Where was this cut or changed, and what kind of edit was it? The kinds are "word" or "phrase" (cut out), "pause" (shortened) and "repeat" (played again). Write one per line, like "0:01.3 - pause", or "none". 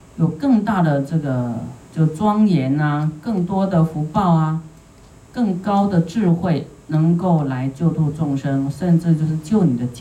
none